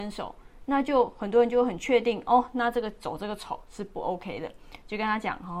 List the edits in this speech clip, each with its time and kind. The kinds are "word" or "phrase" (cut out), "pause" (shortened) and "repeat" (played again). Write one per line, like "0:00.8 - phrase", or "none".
none